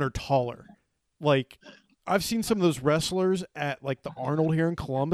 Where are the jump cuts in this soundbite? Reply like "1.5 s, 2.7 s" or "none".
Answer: none